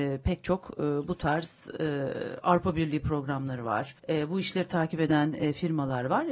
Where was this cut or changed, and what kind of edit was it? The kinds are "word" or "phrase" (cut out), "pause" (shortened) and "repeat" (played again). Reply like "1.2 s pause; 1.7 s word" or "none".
4.0 s pause